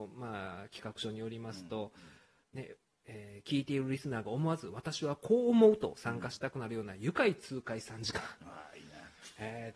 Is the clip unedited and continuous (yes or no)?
yes